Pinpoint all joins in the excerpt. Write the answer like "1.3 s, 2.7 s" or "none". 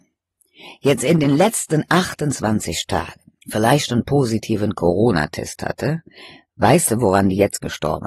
3.4 s